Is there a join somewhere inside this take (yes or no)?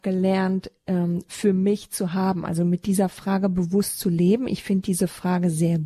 no